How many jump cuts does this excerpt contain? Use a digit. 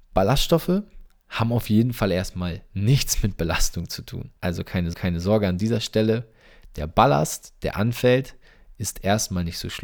2